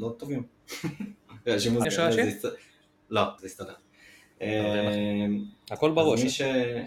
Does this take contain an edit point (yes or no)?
yes